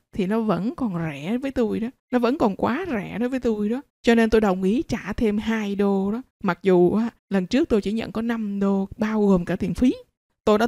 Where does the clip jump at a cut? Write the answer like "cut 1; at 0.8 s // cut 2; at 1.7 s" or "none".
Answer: cut 1; at 2.0 s // cut 2; at 3.9 s // cut 3; at 6.3 s // cut 4; at 7.2 s